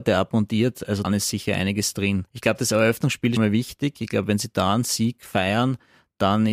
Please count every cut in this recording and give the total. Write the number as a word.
three